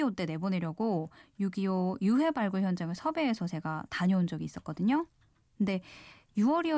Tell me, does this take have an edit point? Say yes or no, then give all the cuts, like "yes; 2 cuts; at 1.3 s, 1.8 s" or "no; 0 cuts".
no; 0 cuts